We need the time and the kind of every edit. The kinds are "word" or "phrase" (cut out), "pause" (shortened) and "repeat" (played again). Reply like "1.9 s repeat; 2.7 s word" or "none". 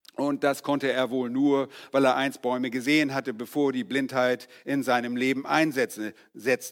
none